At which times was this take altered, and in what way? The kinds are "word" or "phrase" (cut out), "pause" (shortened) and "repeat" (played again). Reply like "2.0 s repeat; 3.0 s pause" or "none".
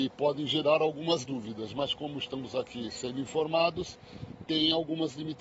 none